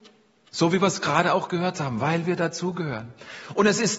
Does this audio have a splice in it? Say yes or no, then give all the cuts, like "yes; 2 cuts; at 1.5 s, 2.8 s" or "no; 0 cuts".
no; 0 cuts